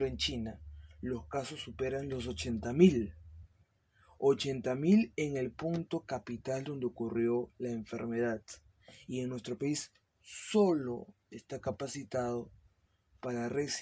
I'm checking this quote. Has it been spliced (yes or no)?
no